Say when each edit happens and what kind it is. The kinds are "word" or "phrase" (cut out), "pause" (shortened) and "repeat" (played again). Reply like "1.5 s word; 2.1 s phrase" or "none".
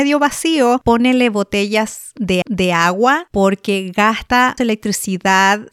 2.4 s repeat; 4.6 s word